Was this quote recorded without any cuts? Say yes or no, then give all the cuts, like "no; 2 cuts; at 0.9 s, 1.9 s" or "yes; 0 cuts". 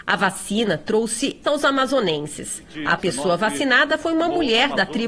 no; 2 cuts; at 1.4 s, 3.0 s